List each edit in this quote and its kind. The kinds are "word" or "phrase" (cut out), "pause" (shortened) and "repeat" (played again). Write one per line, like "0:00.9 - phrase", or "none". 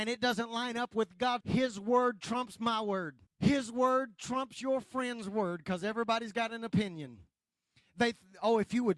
0:01.4 - word
0:03.3 - pause